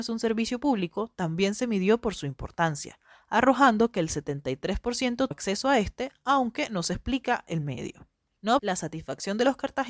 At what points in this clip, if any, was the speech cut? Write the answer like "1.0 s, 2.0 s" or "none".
5.3 s, 8.6 s